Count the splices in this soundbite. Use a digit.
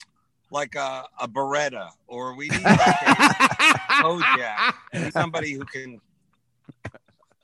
1